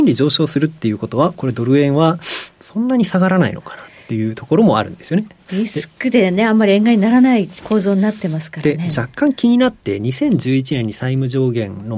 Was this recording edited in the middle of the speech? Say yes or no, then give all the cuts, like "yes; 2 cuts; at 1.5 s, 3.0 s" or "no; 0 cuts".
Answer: no; 0 cuts